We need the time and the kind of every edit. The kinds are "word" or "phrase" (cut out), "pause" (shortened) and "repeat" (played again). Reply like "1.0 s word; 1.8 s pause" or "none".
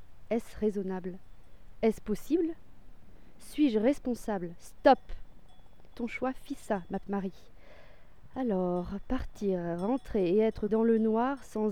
5.9 s word; 7.0 s word; 10.7 s word